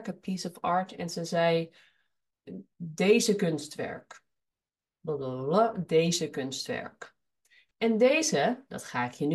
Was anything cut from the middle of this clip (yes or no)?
no